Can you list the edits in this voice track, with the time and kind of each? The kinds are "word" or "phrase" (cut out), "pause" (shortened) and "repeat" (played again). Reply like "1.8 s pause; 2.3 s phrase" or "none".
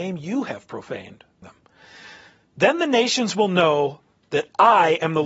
1.4 s word